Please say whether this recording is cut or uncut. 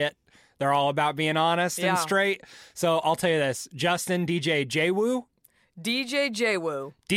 uncut